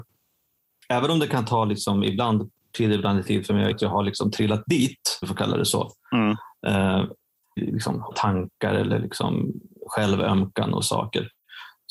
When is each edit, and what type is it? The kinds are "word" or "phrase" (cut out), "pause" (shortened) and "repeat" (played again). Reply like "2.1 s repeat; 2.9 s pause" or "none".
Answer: 2.7 s word; 3.2 s word; 3.7 s word; 5.2 s word; 7.6 s word; 8.1 s word; 10.8 s word